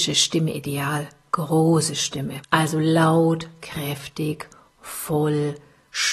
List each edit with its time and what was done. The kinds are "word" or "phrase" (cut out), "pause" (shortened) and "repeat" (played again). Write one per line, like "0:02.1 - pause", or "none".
0:02.4 - pause